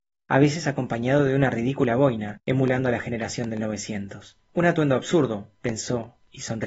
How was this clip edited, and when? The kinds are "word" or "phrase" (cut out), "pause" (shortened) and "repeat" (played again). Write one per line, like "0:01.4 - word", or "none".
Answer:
0:02.4 - pause
0:04.4 - pause

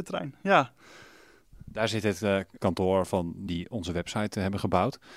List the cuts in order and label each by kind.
0:02.6 - word
0:03.5 - word

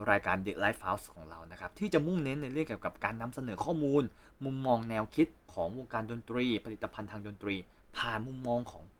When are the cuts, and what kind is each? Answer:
0:05.4 - pause

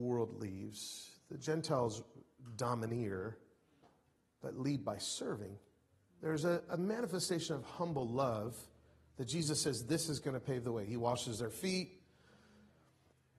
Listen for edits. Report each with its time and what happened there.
none

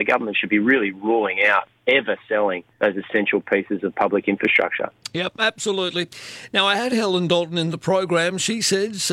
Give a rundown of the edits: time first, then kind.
0:02.7 - pause

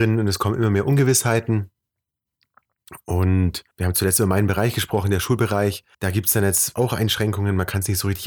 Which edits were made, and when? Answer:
0:03.7 - pause
0:05.9 - pause
0:06.8 - word

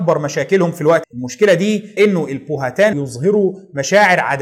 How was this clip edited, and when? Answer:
0:01.0 - word
0:02.0 - word
0:02.9 - word

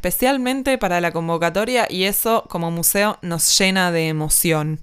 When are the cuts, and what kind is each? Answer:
none

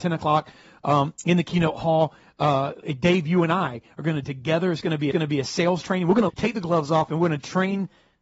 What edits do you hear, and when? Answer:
0:04.2 - phrase
0:05.1 - repeat
0:06.3 - word

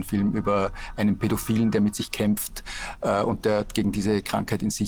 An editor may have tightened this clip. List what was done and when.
none

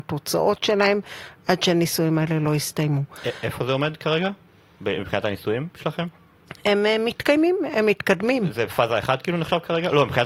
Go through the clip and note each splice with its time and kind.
none

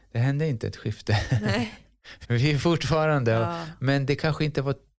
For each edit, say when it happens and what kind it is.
0:02.2 - word

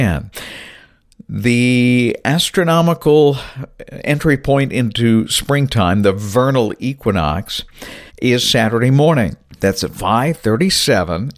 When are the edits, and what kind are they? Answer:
0:08.1 - pause

